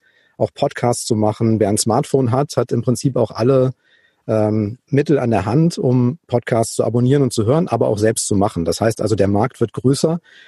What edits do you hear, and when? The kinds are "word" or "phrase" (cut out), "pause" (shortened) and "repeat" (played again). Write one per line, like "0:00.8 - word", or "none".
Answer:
none

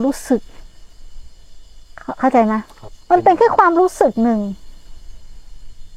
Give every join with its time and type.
0:03.0 - pause

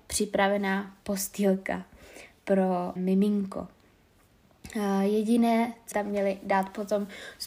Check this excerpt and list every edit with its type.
0:03.0 - word
0:05.9 - word

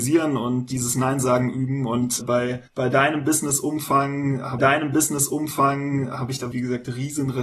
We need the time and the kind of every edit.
0:02.2 - word
0:02.7 - pause
0:04.6 - repeat
0:06.5 - word

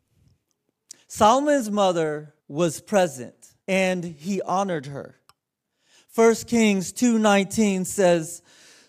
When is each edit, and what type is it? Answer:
0:02.4 - pause
0:03.6 - pause

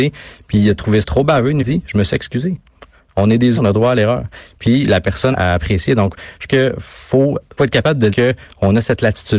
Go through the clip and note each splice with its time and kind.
0:01.0 - word
0:01.6 - word
0:03.6 - word
0:05.3 - word
0:06.5 - word
0:07.6 - word
0:08.1 - word

